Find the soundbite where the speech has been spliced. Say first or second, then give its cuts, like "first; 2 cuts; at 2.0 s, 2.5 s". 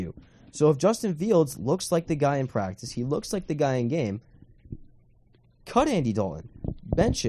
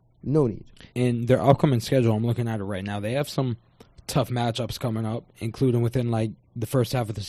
second; 2 cuts; at 0.9 s, 5.3 s